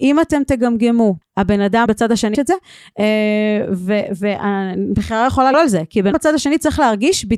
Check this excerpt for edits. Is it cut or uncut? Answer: cut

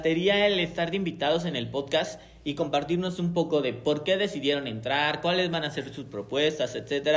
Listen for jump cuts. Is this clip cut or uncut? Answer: uncut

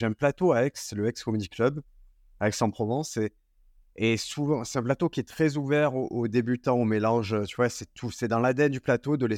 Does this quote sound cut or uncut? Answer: uncut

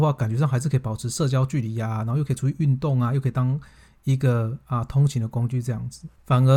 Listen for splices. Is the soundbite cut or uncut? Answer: uncut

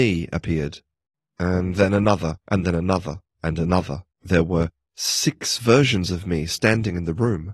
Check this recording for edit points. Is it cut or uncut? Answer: cut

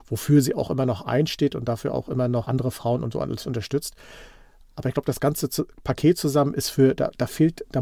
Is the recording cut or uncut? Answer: cut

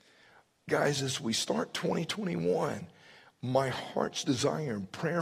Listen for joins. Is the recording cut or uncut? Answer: uncut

